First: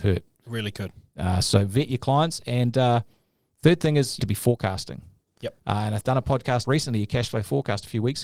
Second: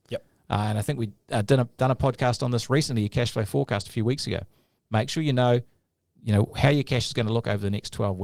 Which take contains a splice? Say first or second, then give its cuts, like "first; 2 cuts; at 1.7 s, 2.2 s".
first; 4 cuts; at 4.2 s, 5.6 s, 6.0 s, 6.6 s